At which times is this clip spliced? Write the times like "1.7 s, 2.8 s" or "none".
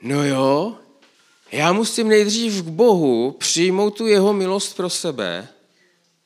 1.1 s